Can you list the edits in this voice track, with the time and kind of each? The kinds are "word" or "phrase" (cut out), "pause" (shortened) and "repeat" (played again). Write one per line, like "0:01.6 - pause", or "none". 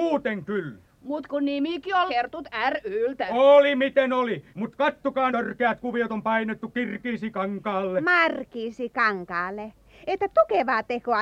0:02.1 - phrase
0:04.5 - pause
0:05.3 - phrase